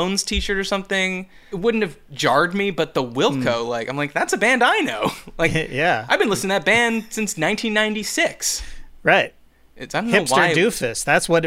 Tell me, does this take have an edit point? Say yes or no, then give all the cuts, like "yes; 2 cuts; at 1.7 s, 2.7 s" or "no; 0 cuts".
yes; 1 cut; at 1.5 s